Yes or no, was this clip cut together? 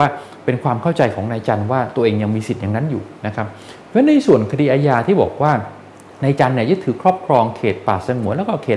yes